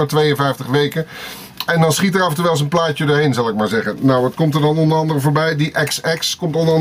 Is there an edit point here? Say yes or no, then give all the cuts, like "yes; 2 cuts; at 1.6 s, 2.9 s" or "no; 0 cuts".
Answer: no; 0 cuts